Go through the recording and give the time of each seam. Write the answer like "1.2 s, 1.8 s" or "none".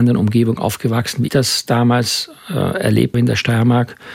1.3 s, 3.1 s